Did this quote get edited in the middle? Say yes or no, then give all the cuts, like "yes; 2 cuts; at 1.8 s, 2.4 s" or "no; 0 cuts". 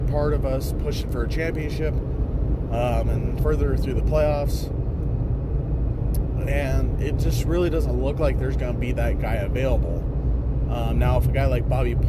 yes; 1 cut; at 3.4 s